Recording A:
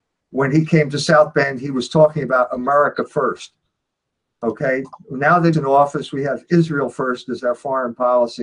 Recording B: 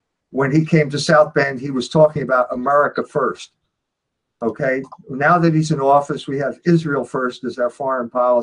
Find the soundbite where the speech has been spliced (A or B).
A